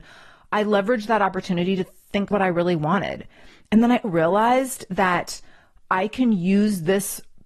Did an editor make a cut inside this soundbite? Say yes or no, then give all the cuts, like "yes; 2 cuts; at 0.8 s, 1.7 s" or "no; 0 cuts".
yes; 2 cuts; at 2.3 s, 4.0 s